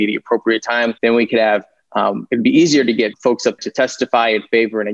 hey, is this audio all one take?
no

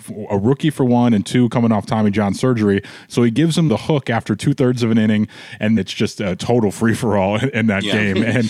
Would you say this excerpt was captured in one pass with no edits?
no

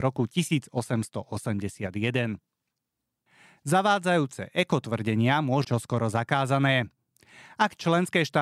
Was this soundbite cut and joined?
yes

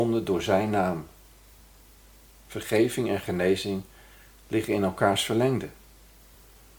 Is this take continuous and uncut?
yes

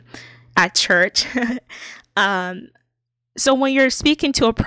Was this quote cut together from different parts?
no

